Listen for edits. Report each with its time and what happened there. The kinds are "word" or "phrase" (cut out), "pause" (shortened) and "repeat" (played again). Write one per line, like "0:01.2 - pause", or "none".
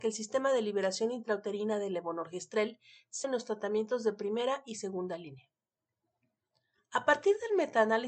0:03.2 - word